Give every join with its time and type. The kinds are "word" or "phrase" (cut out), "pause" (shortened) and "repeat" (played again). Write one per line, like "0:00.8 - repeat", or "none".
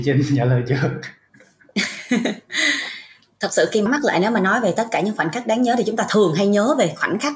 0:03.9 - word